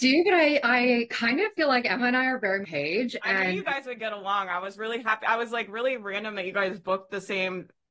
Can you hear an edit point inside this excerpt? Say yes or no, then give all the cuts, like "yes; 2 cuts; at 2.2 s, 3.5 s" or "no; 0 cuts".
yes; 1 cut; at 2.6 s